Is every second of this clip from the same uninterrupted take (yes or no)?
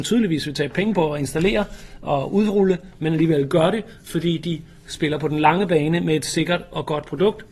yes